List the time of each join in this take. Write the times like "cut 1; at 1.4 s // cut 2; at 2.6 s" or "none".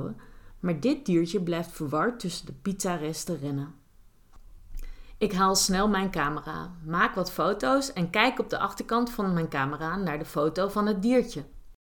none